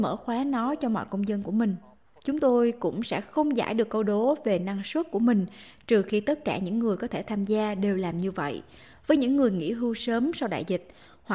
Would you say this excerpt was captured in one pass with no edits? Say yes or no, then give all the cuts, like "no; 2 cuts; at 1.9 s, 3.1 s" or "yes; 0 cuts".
yes; 0 cuts